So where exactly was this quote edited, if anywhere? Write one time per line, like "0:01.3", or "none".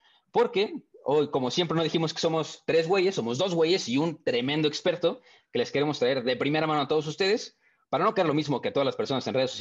none

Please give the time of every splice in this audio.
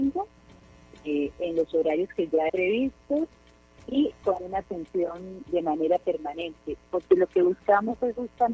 0:02.5
0:03.8
0:05.4

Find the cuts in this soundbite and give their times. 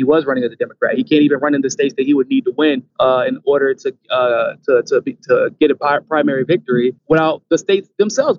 0:02.9
0:07.0

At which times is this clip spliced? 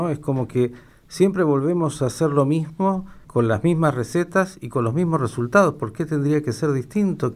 0:03.2

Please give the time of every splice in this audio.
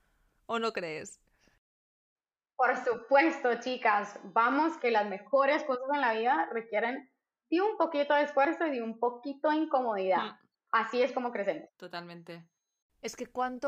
none

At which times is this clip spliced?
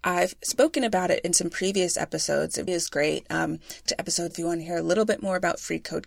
0:02.7
0:03.9
0:04.3

